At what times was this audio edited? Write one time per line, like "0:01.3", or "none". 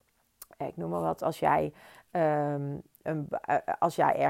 none